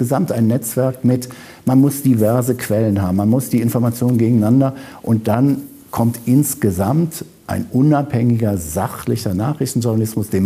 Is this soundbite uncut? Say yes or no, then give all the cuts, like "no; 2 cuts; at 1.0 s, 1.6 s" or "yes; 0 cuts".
yes; 0 cuts